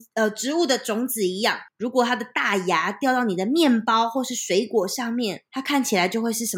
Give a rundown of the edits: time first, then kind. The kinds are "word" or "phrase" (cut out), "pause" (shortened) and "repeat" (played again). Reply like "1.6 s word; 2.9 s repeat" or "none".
1.7 s pause; 5.5 s pause